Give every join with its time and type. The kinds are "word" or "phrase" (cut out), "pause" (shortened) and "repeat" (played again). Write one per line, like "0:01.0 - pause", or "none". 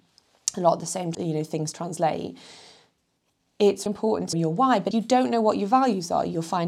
0:01.1 - word
0:03.9 - word
0:04.3 - word
0:04.9 - word